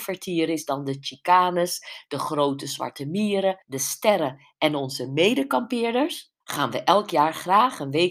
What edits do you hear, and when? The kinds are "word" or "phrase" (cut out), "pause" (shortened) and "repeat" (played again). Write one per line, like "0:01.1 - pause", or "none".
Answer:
0:03.6 - pause
0:06.4 - pause